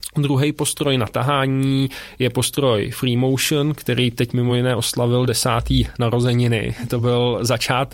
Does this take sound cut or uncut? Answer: uncut